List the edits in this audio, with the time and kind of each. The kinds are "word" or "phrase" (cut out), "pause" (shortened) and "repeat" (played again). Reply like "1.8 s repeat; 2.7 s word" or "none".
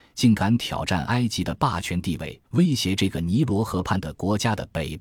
2.4 s pause